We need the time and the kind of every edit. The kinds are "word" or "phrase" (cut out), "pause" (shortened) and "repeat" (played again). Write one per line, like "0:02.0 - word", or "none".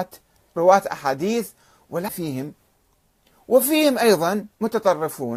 0:02.1 - word